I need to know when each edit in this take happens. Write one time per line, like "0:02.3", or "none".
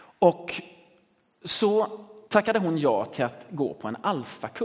0:02.3